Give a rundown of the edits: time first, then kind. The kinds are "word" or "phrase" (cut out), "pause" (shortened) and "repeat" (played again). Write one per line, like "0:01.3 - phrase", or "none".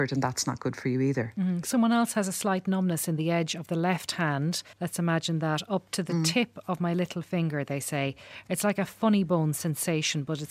0:04.7 - pause